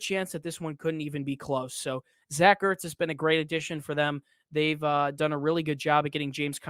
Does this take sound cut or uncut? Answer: uncut